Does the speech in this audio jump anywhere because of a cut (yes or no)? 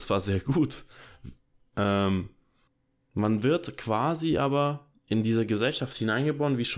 yes